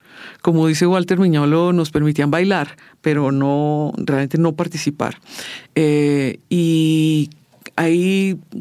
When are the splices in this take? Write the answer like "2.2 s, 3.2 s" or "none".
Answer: none